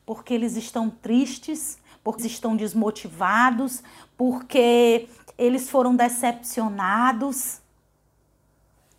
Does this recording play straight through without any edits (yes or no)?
no